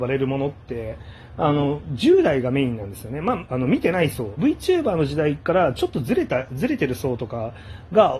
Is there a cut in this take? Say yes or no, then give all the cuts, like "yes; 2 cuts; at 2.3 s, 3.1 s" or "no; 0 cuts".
yes; 2 cuts; at 3.5 s, 4.4 s